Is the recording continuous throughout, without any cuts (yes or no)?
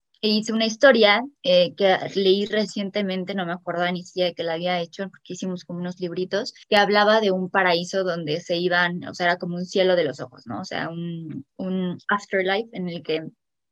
no